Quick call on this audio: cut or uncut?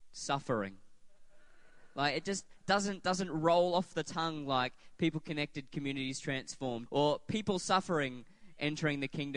cut